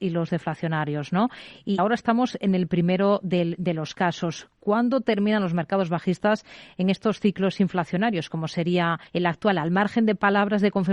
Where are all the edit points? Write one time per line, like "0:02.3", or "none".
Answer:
0:01.8
0:09.1